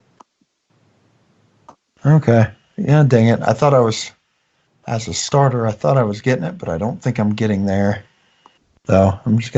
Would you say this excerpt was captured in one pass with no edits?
yes; 0 cuts

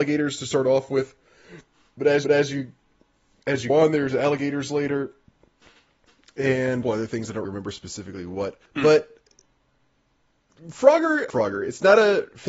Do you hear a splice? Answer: yes; 6 cuts; at 2.2 s, 3.7 s, 6.8 s, 7.4 s, 8.7 s, 11.3 s

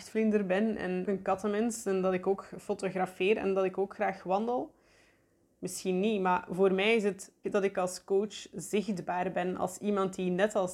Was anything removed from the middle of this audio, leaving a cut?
yes; 2 cuts; at 1.1 s, 7.4 s

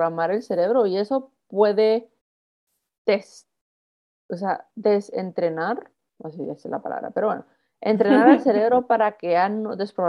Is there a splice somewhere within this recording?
no; 0 cuts

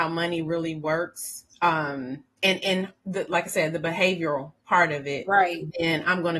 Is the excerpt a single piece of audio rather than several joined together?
no; 1 cut; at 1.5 s

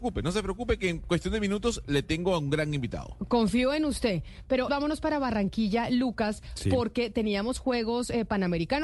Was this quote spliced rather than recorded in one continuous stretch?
yes; 1 cut; at 4.7 s

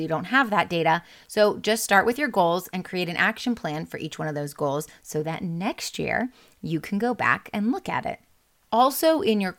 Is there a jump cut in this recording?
no; 0 cuts

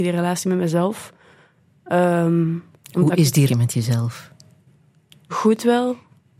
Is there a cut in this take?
yes; 1 cut; at 3.5 s

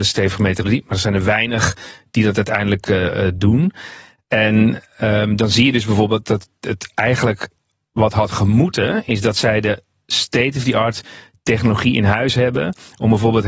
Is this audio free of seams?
yes; 0 cuts

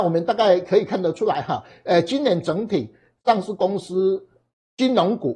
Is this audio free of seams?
yes; 0 cuts

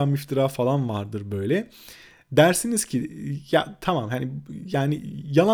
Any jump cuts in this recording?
no; 0 cuts

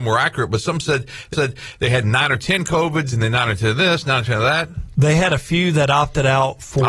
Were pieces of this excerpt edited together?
yes; 1 cut; at 1.3 s

